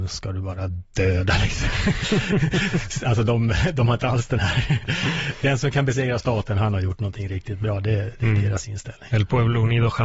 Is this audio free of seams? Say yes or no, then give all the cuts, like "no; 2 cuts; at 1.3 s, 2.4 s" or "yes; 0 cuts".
yes; 0 cuts